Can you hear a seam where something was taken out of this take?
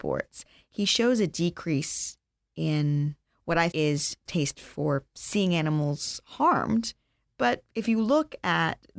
yes; 2 cuts; at 3.7 s, 4.3 s

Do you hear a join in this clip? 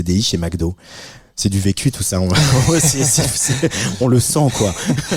no; 0 cuts

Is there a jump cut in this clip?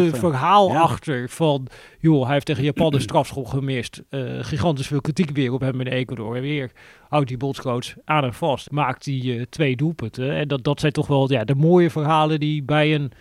yes; 1 cut; at 8.7 s

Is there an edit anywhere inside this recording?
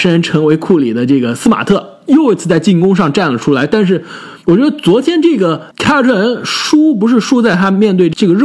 yes; 1 cut; at 4.4 s

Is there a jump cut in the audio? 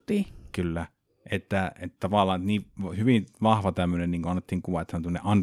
no; 0 cuts

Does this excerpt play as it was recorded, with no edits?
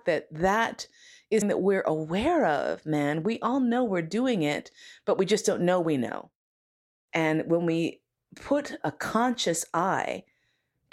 no; 2 cuts; at 1.4 s, 8.2 s

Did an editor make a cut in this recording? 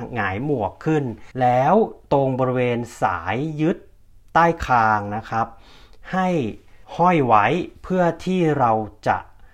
yes; 2 cuts; at 1.3 s, 6.8 s

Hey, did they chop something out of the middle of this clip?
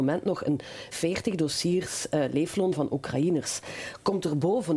yes; 1 cut; at 0.9 s

